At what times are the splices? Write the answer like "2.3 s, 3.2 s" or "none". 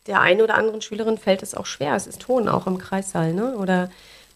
2.2 s